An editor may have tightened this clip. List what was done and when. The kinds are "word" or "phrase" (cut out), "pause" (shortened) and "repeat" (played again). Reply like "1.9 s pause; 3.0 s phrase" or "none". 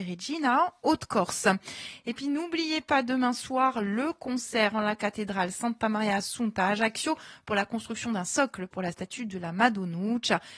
none